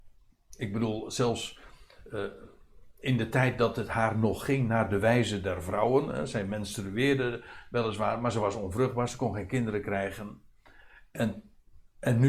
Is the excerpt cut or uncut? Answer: cut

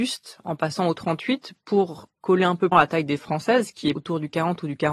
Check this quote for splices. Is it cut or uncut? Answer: cut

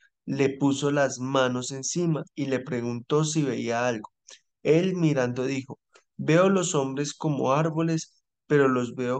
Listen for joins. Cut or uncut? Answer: uncut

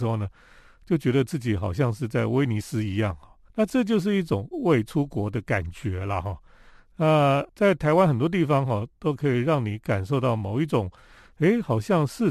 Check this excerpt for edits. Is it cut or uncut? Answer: uncut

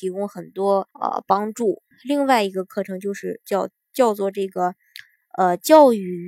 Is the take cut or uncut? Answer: cut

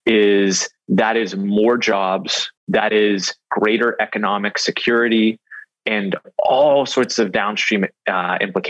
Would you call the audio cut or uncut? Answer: cut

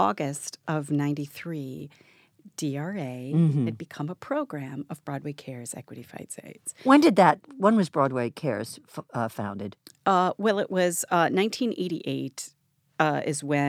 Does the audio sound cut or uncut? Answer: cut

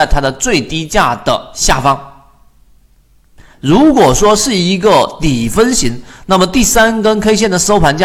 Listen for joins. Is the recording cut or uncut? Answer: uncut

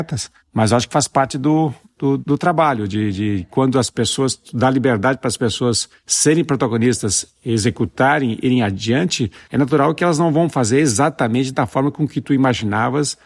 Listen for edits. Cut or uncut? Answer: cut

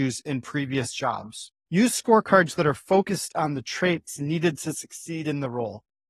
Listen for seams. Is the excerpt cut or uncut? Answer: uncut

